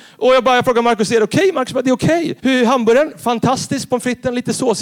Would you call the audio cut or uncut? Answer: cut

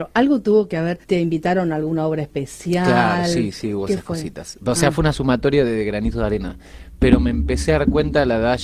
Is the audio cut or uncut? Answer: cut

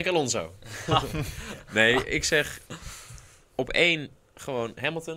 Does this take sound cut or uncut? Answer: uncut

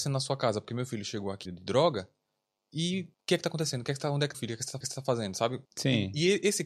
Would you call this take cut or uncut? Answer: cut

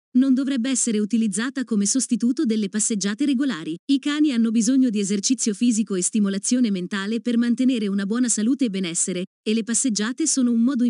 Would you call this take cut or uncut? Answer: cut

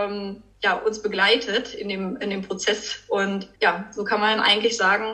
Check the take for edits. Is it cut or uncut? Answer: cut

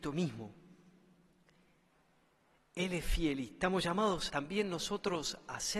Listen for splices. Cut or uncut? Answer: cut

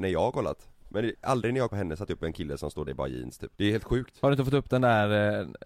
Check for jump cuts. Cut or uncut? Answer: cut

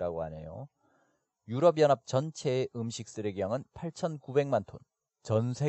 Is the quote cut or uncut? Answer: uncut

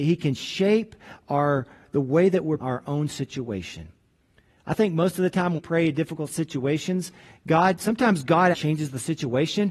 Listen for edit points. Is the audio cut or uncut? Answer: cut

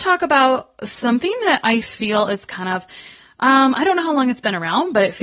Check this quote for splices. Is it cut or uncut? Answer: uncut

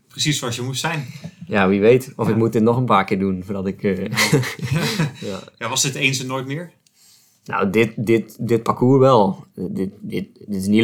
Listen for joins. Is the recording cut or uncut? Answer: uncut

